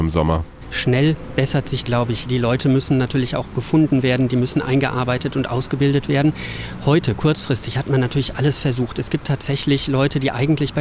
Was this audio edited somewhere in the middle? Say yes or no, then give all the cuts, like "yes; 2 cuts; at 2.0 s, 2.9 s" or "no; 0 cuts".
yes; 2 cuts; at 1.8 s, 2.3 s